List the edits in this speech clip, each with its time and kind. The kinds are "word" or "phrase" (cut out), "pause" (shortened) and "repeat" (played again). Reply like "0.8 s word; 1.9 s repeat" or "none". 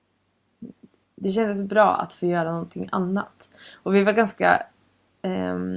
1.0 s pause

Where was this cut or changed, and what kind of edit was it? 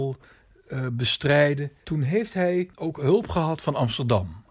1.8 s pause

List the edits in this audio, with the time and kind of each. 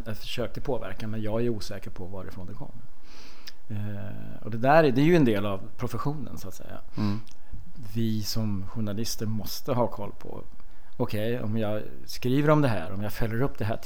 none

